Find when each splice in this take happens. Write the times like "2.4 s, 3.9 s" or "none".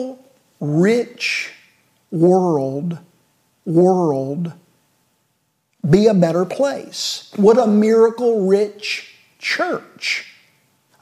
3.6 s